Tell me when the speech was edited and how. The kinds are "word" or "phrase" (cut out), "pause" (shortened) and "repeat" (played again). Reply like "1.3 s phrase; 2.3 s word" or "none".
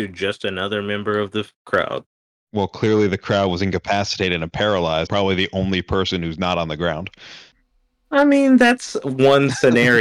5.1 s word